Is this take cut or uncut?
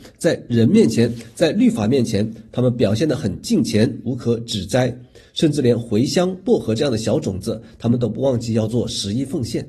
uncut